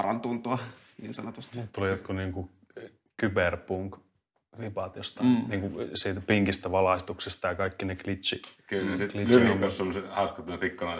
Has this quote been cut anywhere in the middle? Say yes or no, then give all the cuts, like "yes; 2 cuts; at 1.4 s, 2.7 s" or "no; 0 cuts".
no; 0 cuts